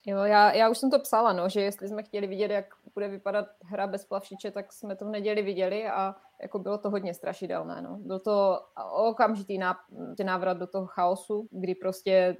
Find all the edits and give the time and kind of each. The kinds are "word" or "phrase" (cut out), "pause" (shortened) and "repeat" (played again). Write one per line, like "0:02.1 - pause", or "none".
0:06.2 - pause
0:10.2 - word
0:11.5 - word

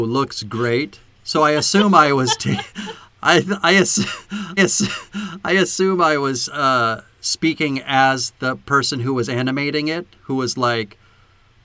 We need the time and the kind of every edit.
0:04.6 - repeat

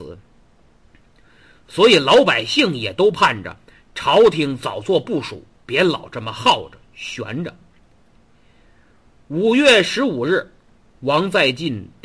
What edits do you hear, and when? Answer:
none

